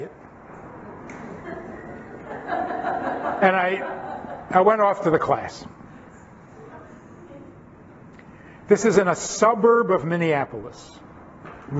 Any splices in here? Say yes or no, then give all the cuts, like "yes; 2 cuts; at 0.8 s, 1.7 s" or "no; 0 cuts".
no; 0 cuts